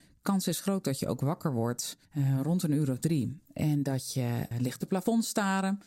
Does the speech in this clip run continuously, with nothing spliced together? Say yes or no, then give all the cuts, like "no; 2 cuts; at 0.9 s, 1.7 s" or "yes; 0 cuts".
no; 2 cuts; at 2.0 s, 4.5 s